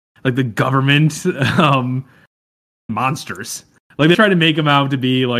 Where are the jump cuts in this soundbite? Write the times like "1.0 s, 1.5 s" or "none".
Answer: 2.9 s, 4.1 s